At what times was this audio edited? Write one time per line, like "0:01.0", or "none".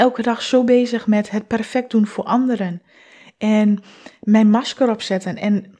none